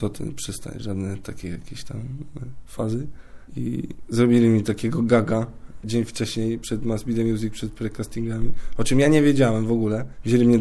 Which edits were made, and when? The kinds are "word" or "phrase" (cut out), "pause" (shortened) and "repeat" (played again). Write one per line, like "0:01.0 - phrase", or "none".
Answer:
0:05.8 - phrase